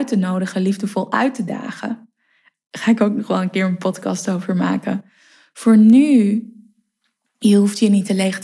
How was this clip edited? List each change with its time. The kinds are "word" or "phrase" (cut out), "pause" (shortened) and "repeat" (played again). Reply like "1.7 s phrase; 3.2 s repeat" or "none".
none

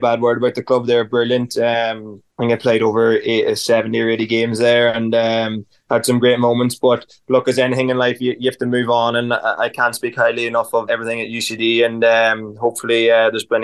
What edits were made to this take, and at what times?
2.3 s pause; 10.9 s word

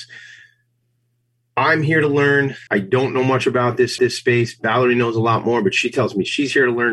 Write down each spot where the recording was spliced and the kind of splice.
2.7 s pause; 4.0 s repeat

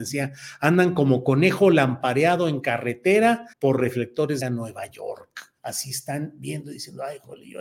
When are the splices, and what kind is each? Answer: 3.5 s pause; 4.4 s word; 5.6 s pause

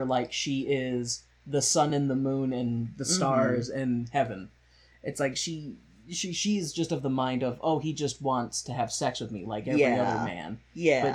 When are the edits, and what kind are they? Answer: none

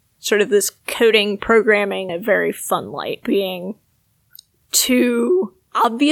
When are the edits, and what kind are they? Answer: 2.1 s word; 3.2 s word

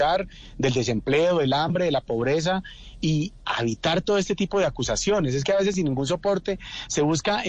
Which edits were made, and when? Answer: none

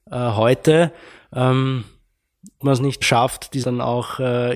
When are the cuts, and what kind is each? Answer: 2.6 s word; 3.0 s word; 3.6 s word

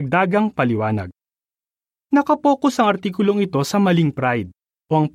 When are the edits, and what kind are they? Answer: none

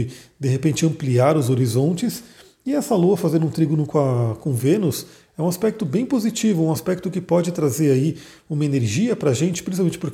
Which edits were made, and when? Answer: none

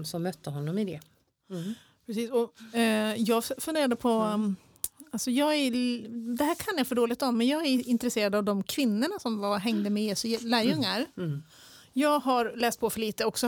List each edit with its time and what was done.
none

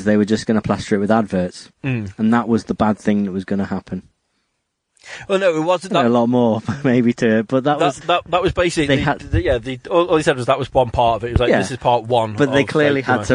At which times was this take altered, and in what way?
1.7 s pause; 8.0 s word

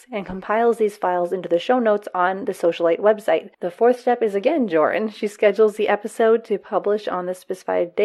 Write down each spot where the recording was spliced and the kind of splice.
3.5 s pause

